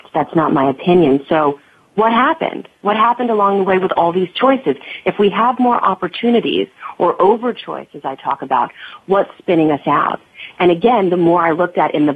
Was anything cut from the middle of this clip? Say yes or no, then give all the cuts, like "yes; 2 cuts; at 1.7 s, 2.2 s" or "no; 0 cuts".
no; 0 cuts